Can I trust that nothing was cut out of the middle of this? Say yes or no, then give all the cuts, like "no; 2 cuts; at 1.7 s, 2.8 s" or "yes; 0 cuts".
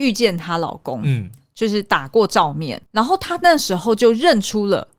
no; 1 cut; at 2.9 s